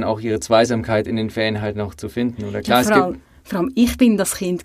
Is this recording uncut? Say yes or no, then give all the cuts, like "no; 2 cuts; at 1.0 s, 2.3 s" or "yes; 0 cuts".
yes; 0 cuts